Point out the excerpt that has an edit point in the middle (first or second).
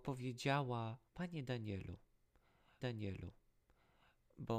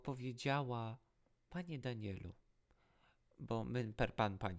first